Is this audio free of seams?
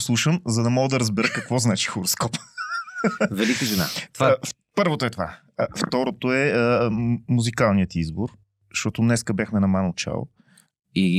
yes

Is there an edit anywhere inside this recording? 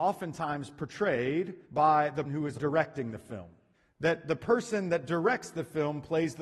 yes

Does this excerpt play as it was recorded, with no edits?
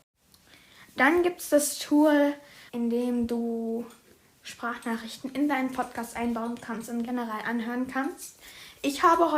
no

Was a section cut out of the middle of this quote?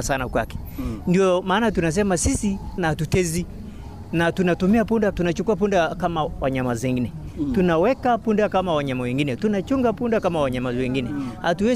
yes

